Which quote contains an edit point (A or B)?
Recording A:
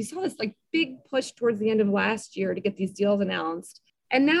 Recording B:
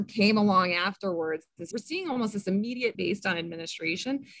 B